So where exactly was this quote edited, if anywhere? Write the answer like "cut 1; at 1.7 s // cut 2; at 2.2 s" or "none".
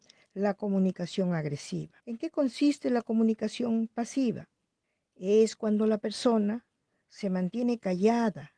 cut 1; at 2.0 s // cut 2; at 4.8 s

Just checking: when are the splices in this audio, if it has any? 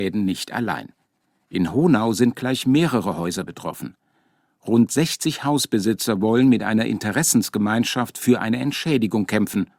none

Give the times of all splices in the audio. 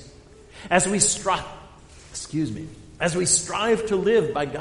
none

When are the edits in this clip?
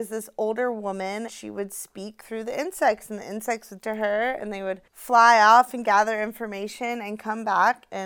cut 1; at 1.3 s // cut 2; at 3.8 s // cut 3; at 4.9 s

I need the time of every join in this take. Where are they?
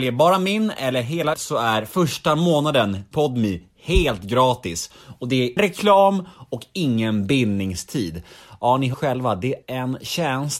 cut 1; at 1.3 s // cut 2; at 3.1 s // cut 3; at 5.6 s // cut 4; at 8.9 s // cut 5; at 9.6 s

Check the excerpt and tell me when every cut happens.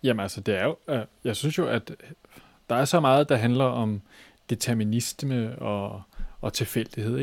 none

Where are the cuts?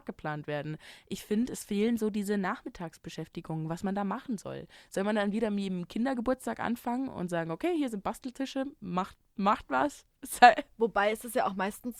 none

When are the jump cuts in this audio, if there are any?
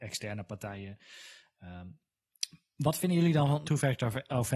cut 1; at 3.7 s

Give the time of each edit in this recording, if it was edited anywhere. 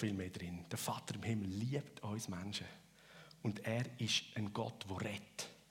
none

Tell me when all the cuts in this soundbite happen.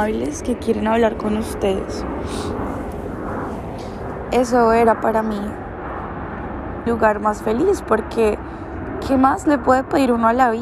cut 1; at 6.9 s

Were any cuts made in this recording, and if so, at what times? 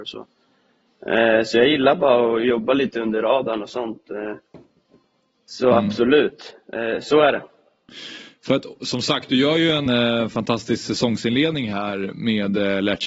cut 1; at 9.9 s

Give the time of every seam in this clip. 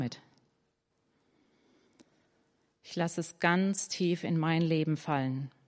none

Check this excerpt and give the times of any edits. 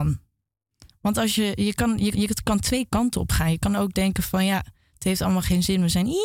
cut 1; at 2.1 s

